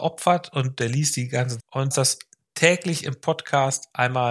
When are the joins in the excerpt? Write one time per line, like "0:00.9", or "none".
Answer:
0:01.6
0:01.9